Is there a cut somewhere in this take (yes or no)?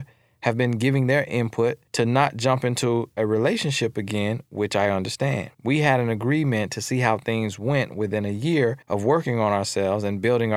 yes